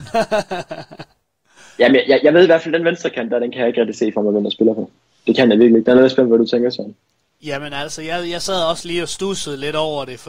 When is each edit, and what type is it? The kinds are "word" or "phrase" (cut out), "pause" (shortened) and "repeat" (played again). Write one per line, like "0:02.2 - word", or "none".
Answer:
none